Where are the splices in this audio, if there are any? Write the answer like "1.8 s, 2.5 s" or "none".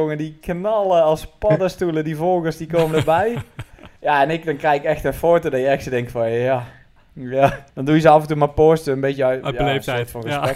4.0 s, 7.7 s